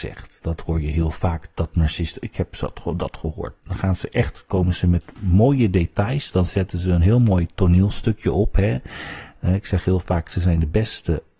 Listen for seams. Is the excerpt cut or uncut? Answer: cut